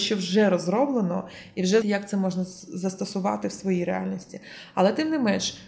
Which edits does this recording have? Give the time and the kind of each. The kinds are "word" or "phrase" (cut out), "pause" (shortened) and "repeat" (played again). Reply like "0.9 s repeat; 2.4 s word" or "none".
1.8 s word